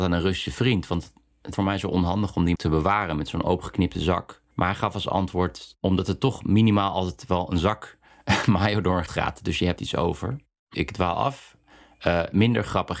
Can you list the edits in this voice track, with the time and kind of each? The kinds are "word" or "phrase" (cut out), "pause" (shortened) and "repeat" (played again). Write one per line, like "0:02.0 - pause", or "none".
0:01.5 - word
0:02.5 - word
0:04.5 - pause
0:09.1 - word
0:09.8 - word
0:10.7 - word